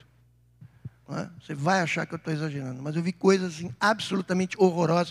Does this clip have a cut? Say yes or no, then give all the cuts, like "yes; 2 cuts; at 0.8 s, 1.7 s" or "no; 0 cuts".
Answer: no; 0 cuts